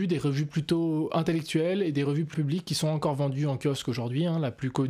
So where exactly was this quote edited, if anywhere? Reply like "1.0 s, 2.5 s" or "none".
2.3 s